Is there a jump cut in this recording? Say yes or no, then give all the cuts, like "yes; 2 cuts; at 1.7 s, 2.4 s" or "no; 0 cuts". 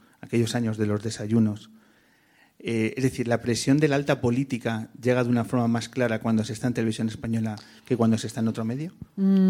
no; 0 cuts